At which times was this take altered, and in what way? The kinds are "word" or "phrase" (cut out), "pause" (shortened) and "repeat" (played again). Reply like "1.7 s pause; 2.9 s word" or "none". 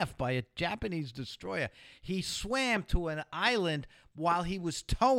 none